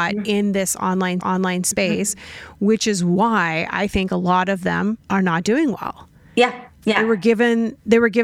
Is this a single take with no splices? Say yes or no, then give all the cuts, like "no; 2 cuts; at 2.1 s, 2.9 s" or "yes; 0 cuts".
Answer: no; 3 cuts; at 1.2 s, 5.0 s, 6.7 s